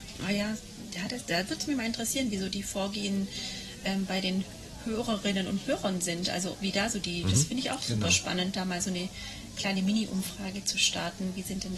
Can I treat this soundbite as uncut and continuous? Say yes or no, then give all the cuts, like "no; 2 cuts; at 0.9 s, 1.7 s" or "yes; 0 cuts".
yes; 0 cuts